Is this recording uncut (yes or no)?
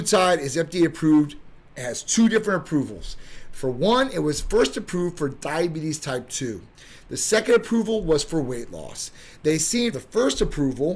no